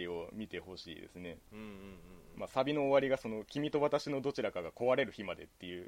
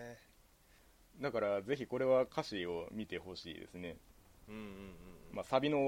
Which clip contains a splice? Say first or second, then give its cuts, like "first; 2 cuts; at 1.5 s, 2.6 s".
first; 1 cut; at 1.5 s